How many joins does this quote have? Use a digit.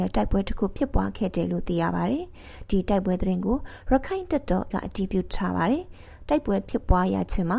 1